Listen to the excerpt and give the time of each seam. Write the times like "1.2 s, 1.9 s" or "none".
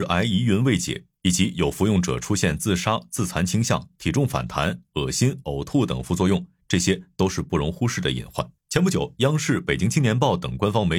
8.6 s